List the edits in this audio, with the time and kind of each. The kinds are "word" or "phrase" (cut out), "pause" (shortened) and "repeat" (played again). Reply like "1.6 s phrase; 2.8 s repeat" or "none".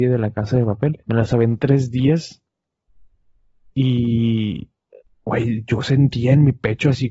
1.0 s pause; 1.6 s word; 5.0 s pause